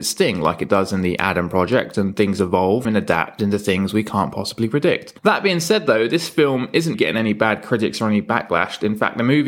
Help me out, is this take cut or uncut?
cut